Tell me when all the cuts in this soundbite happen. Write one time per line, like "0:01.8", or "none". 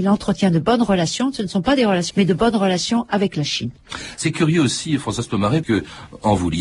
0:02.1
0:05.6